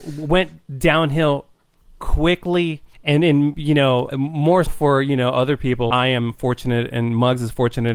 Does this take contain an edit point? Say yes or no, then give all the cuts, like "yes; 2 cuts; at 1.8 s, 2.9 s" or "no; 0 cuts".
yes; 4 cuts; at 2.9 s, 4.1 s, 4.7 s, 5.9 s